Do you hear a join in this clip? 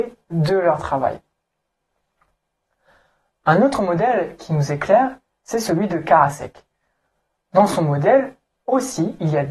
no; 0 cuts

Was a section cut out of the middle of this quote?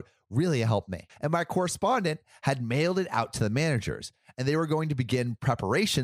no; 0 cuts

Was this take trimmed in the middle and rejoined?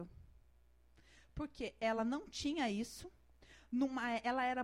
no; 0 cuts

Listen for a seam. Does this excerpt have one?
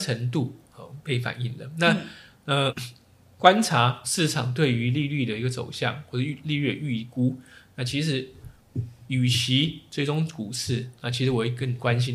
yes; 2 cuts; at 2.7 s, 4.0 s

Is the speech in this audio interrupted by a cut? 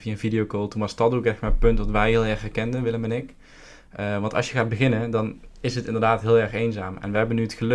no; 0 cuts

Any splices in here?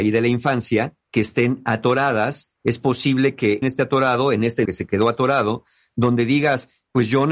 yes; 4 cuts; at 1.0 s, 2.5 s, 3.6 s, 4.6 s

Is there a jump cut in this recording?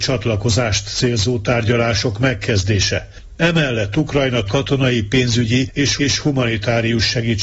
yes; 2 cuts; at 4.5 s, 6.0 s

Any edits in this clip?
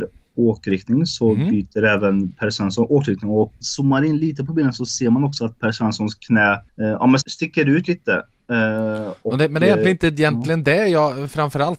yes; 3 cuts; at 3.6 s, 6.7 s, 7.2 s

